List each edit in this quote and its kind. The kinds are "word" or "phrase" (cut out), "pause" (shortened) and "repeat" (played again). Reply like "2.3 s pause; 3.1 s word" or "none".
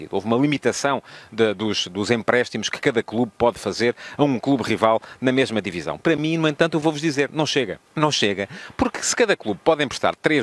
7.9 s pause